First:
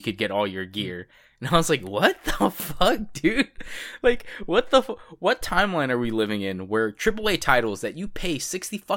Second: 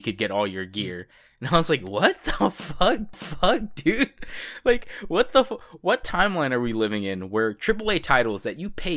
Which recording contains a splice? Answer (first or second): second